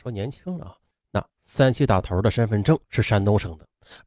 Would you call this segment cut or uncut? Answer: cut